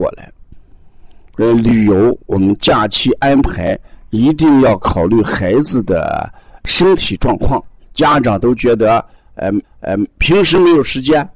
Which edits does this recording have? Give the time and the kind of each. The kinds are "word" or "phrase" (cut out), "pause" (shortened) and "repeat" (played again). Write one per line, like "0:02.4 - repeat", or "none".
0:07.8 - word
0:09.6 - repeat